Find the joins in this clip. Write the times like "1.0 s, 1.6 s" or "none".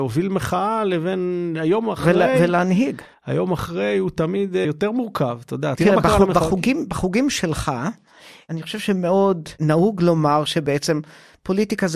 4.6 s, 5.8 s